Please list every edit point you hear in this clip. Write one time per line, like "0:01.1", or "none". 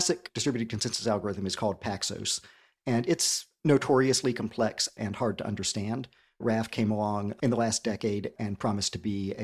none